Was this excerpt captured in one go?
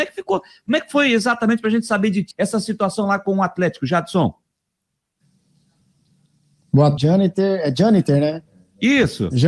no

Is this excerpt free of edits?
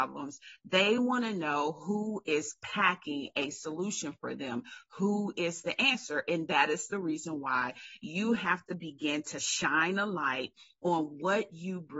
yes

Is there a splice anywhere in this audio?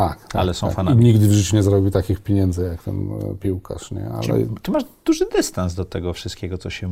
no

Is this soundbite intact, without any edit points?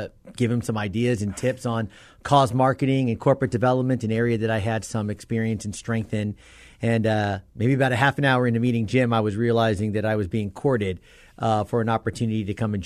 yes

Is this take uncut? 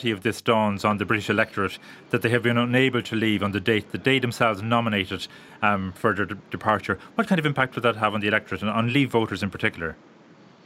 yes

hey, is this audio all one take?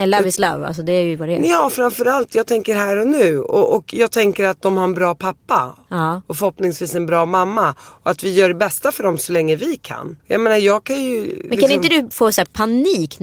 no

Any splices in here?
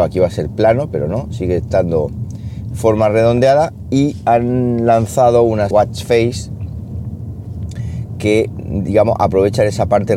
yes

